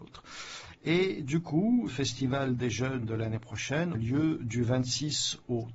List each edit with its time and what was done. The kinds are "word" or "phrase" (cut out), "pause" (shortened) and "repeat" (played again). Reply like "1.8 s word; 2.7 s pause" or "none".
1.9 s word; 3.9 s word